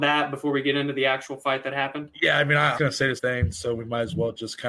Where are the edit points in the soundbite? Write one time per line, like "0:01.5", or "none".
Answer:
0:02.7
0:03.2